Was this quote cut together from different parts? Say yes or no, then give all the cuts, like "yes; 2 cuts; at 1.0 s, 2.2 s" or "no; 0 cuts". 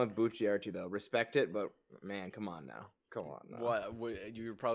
no; 0 cuts